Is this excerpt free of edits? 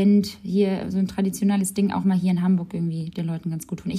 yes; 0 cuts

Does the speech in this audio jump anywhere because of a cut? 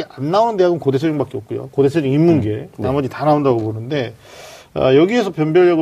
no; 0 cuts

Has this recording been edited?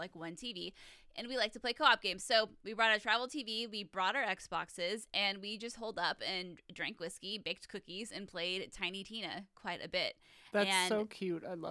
no; 0 cuts

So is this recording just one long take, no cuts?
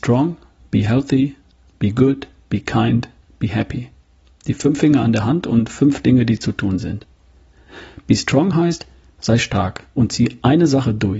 yes; 0 cuts

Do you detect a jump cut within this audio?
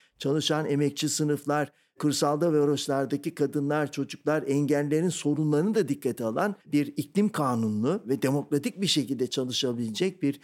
yes; 1 cut; at 6.6 s

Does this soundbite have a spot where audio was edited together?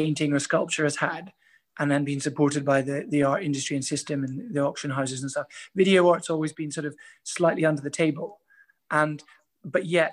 no; 0 cuts

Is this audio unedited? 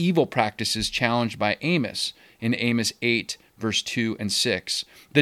yes; 0 cuts

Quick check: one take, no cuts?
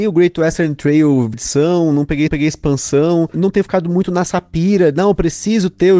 no; 2 cuts; at 1.3 s, 2.3 s

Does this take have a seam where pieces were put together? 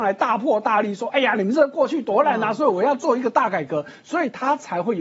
no; 0 cuts

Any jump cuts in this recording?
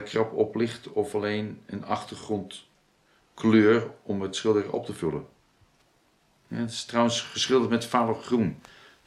no; 0 cuts

